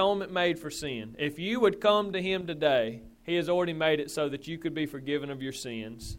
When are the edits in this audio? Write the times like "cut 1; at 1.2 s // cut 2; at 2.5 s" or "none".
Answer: cut 1; at 3.1 s